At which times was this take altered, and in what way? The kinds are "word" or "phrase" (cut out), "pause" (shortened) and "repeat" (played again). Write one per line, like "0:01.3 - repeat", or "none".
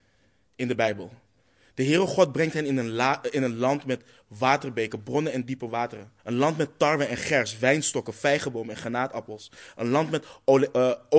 0:06.2 - pause